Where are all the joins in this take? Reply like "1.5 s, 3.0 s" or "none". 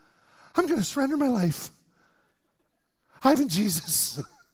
3.4 s